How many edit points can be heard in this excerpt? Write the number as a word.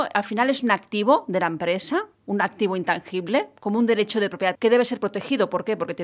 one